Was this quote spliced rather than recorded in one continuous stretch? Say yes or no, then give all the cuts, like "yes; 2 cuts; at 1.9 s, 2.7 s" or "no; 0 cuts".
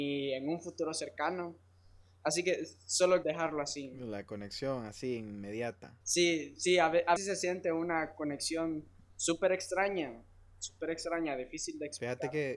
yes; 3 cuts; at 3.2 s, 6.0 s, 7.2 s